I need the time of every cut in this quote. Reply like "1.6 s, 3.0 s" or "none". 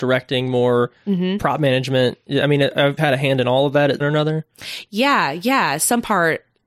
3.0 s, 4.0 s